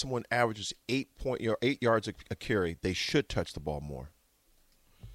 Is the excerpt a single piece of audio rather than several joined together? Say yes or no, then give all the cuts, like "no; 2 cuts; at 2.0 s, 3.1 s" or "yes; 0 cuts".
yes; 0 cuts